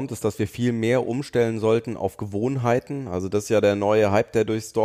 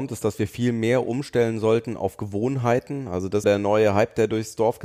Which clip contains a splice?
second; 1 cut; at 3.4 s

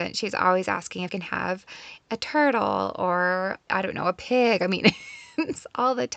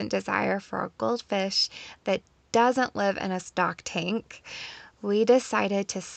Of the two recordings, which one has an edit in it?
first; 2 cuts; at 1.1 s, 3.7 s

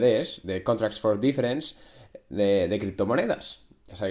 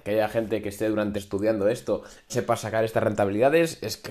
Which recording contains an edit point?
second; 2 cuts; at 1.1 s, 2.3 s

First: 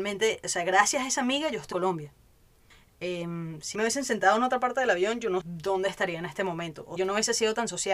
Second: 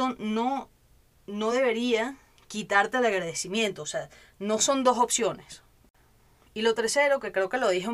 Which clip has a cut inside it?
first; 4 cuts; at 1.7 s, 3.7 s, 5.4 s, 7.0 s

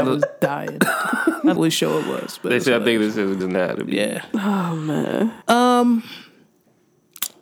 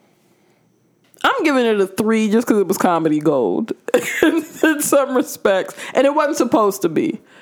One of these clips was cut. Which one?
first; 3 cuts; at 1.6 s, 3.4 s, 5.4 s

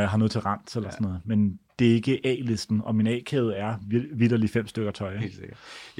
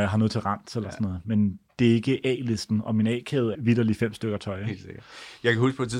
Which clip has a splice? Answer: second; 1 cut; at 3.5 s

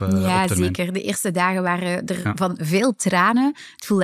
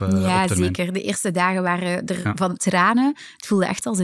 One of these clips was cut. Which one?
second; 1 cut; at 2.6 s

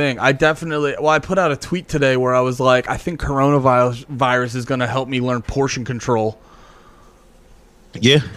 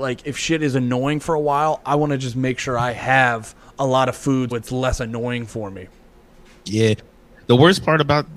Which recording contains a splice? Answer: second; 1 cut; at 4.5 s

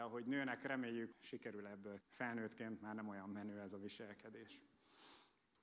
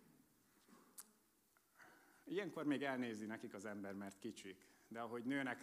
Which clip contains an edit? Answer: first; 2 cuts; at 1.1 s, 2.0 s

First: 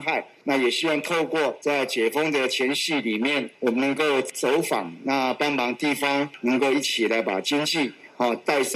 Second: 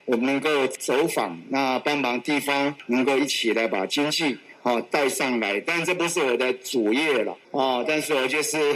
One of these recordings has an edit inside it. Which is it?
second; 1 cut; at 7.4 s

